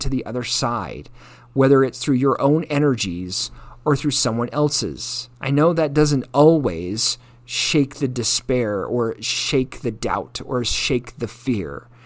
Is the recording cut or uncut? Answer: cut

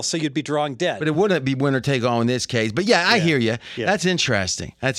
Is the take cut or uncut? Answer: uncut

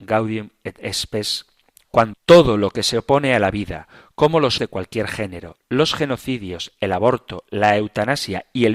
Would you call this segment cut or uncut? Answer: cut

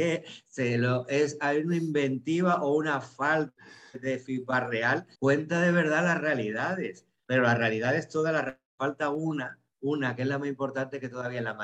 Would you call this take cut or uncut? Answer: cut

